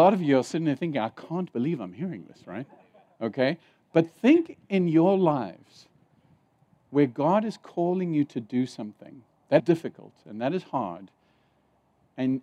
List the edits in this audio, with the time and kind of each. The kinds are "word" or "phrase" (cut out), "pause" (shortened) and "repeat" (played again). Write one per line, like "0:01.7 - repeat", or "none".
0:09.6 - word